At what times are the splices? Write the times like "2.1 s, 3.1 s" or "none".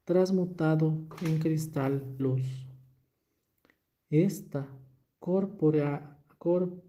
2.2 s